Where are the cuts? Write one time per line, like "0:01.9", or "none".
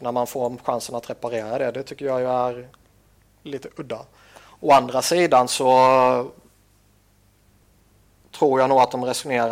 none

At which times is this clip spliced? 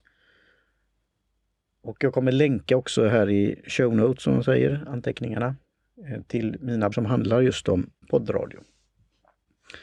0:06.9
0:08.0

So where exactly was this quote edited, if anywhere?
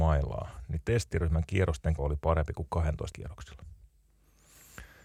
0:02.0
0:03.1

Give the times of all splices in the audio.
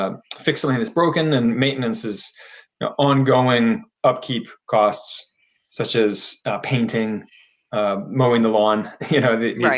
none

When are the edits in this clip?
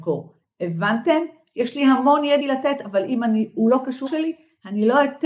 0:02.4
0:04.1

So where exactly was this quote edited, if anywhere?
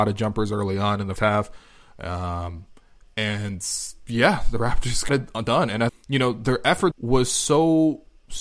0:01.2
0:05.1
0:05.9
0:06.9

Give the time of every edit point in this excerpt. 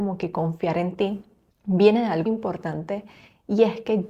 0:01.5
0:02.3

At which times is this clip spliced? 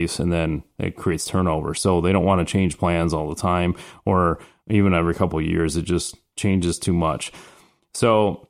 none

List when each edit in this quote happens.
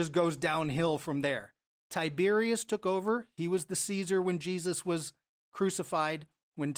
none

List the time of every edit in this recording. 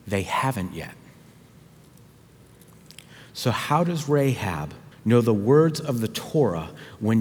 0:04.9

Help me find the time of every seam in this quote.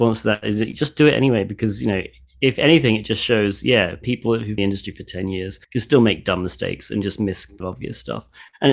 0:04.0
0:04.6
0:05.6
0:07.6

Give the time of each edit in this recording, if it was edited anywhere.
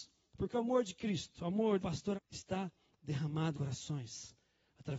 0:01.8
0:02.2
0:03.5

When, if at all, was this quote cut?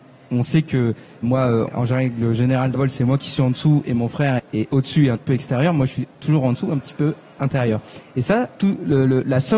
0:01.2
0:01.7
0:02.7
0:04.4
0:05.2
0:08.5

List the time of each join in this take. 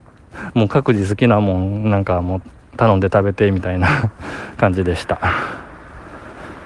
0:04.1

